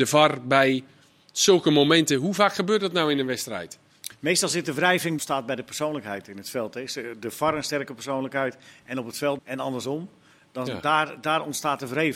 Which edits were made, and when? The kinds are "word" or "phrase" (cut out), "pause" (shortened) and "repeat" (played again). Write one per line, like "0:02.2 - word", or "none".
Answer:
0:05.2 - phrase
0:09.4 - word